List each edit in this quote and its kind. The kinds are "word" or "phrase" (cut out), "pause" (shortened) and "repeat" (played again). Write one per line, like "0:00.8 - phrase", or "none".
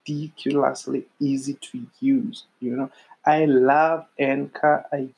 none

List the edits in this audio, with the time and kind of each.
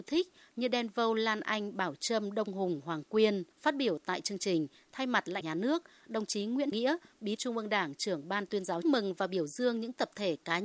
0:03.5 - pause
0:05.4 - phrase
0:06.7 - word
0:07.4 - word
0:08.8 - phrase

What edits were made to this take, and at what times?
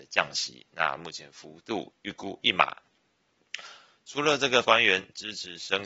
0:04.6 - word

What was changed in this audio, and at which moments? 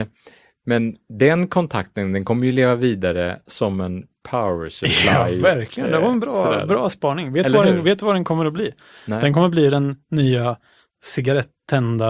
none

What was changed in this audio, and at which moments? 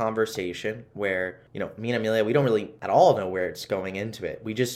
none

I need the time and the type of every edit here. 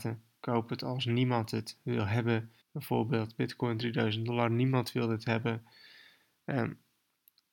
0:02.6 - pause

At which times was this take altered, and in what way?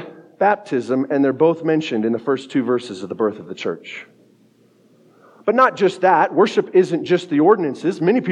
none

